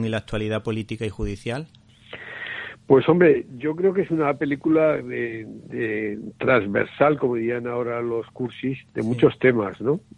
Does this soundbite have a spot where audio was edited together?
yes; 1 cut; at 8.9 s

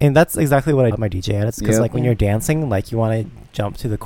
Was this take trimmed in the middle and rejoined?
yes; 1 cut; at 0.9 s

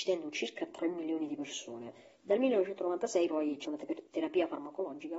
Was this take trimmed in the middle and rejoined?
yes; 2 cuts; at 2.1 s, 3.6 s

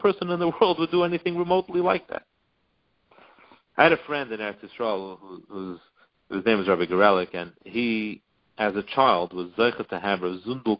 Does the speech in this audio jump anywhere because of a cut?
no; 0 cuts

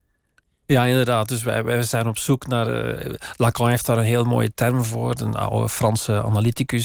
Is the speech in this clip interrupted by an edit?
no; 0 cuts

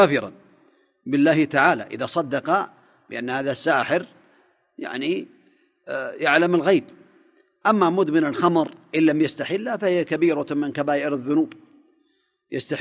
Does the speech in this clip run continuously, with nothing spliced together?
yes; 0 cuts

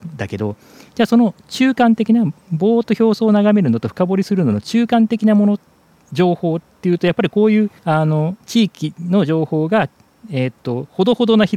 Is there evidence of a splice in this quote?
yes; 1 cut; at 7.8 s

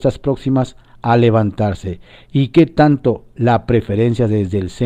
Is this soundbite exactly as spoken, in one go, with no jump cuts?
yes; 0 cuts

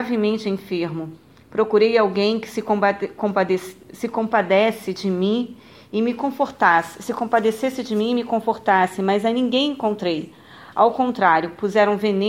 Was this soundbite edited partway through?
no; 0 cuts

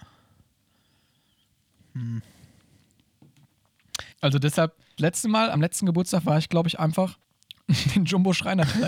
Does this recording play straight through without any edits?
no; 4 cuts; at 4.1 s, 5.0 s, 5.5 s, 7.2 s

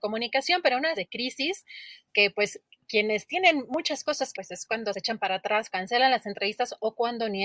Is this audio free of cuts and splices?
no; 4 cuts; at 0.9 s, 2.1 s, 4.3 s, 5.7 s

